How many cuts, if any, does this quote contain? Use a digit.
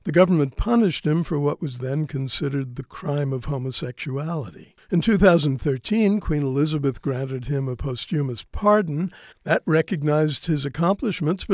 2